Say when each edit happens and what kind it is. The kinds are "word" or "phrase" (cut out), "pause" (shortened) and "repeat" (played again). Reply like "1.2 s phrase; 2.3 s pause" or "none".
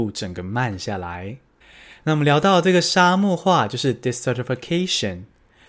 1.6 s pause